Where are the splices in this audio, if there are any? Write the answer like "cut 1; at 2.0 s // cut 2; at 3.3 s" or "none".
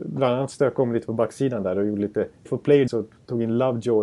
cut 1; at 2.5 s // cut 2; at 2.9 s